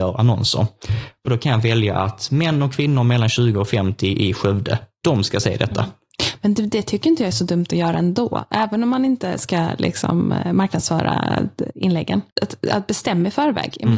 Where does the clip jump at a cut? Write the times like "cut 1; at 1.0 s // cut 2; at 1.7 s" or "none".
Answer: cut 1; at 12.3 s